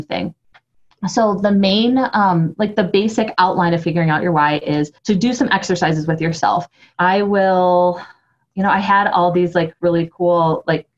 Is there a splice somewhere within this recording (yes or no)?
yes